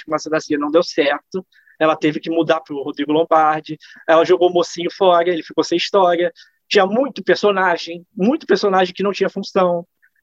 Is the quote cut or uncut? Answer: uncut